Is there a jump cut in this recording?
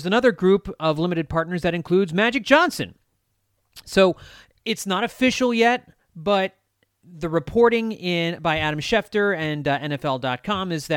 no; 0 cuts

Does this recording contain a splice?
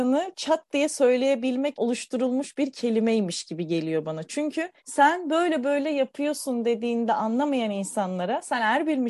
yes; 2 cuts; at 1.7 s, 4.8 s

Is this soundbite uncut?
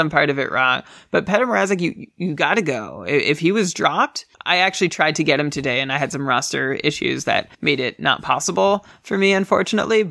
no; 2 cuts; at 4.3 s, 7.5 s

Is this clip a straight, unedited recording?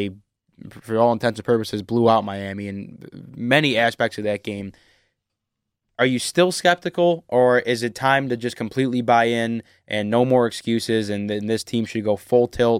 yes; 0 cuts

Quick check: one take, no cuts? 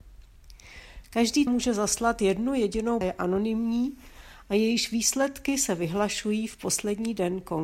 no; 2 cuts; at 1.5 s, 3.0 s

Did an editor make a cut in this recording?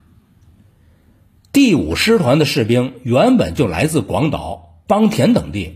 yes; 1 cut; at 4.9 s

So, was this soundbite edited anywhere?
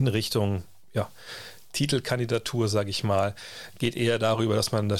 no; 0 cuts

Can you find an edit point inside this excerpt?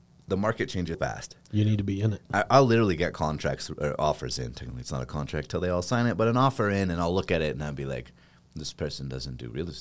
yes; 1 cut; at 0.9 s

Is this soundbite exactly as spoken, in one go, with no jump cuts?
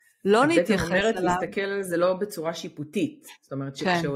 yes; 0 cuts

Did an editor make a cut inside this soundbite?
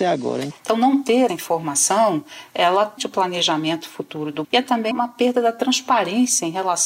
yes; 4 cuts; at 1.3 s, 3.0 s, 4.4 s, 4.9 s

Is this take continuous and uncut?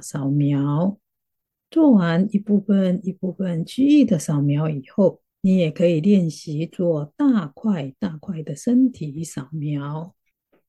no; 1 cut; at 5.3 s

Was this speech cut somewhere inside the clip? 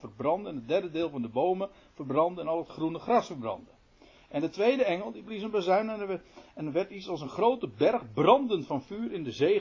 no; 0 cuts

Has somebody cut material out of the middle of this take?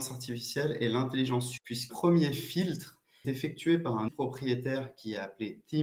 yes; 4 cuts; at 1.6 s, 1.9 s, 3.2 s, 4.1 s

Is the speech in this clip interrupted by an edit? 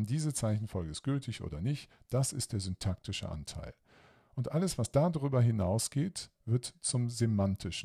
no; 0 cuts

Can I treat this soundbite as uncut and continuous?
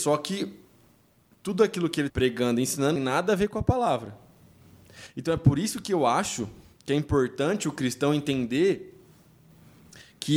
no; 2 cuts; at 2.1 s, 3.0 s

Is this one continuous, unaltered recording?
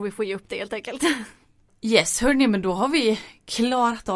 yes; 0 cuts

